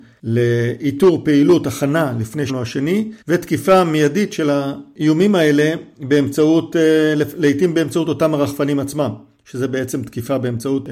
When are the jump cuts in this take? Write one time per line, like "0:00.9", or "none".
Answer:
0:02.5
0:03.2